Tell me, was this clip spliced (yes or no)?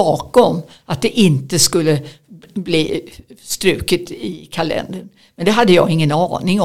no